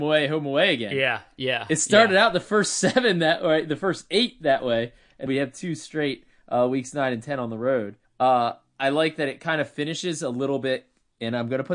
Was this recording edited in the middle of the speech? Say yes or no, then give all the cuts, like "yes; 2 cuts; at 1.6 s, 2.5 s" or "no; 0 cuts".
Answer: yes; 2 cuts; at 5.3 s, 8.0 s